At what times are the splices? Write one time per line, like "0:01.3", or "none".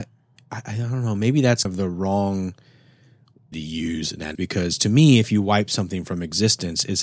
0:01.6
0:03.5
0:04.4